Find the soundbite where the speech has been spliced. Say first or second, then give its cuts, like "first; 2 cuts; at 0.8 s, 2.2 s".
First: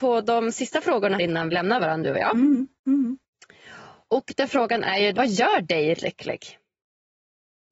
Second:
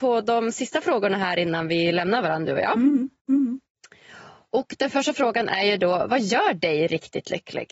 first; 5 cuts; at 1.2 s, 1.5 s, 4.5 s, 5.1 s, 6.0 s